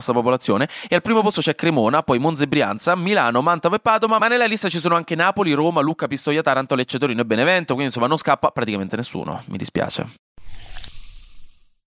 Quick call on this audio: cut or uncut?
uncut